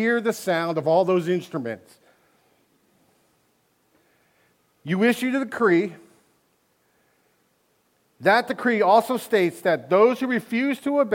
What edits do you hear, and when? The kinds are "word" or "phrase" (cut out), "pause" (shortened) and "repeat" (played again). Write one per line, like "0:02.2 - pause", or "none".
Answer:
none